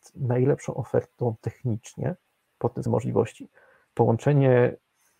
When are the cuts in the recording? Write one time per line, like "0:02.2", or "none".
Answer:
0:02.9